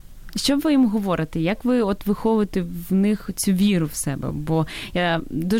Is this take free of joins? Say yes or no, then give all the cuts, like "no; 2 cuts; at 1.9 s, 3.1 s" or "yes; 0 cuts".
yes; 0 cuts